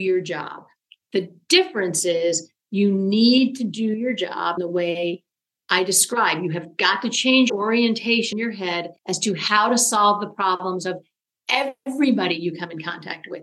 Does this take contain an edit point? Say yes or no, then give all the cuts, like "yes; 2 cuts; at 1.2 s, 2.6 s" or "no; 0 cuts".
yes; 4 cuts; at 4.6 s, 7.5 s, 8.3 s, 9.0 s